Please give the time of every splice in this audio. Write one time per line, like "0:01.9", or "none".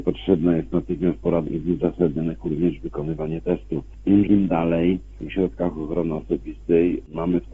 0:01.5
0:02.4
0:04.3
0:05.3